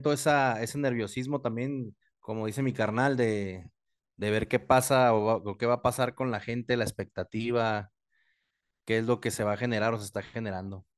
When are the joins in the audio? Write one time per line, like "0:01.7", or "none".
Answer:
0:02.0